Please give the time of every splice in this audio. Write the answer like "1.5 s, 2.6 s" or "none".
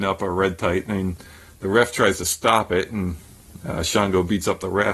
none